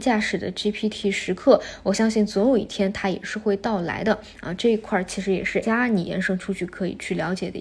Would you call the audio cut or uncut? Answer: cut